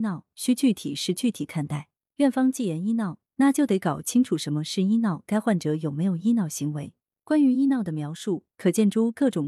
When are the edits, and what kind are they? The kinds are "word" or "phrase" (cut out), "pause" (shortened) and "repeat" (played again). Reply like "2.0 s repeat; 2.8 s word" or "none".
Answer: none